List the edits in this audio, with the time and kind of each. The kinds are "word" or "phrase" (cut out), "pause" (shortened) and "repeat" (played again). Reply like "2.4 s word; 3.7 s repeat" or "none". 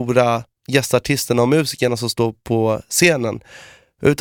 none